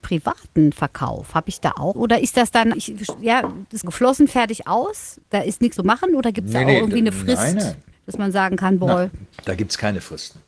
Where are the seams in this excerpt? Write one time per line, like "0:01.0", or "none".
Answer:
0:01.9
0:02.7
0:03.8
0:05.3
0:05.8
0:07.9